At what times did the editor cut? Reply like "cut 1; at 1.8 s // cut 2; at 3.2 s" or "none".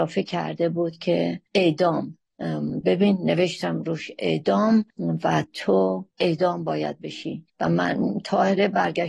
cut 1; at 4.9 s // cut 2; at 6.1 s // cut 3; at 7.5 s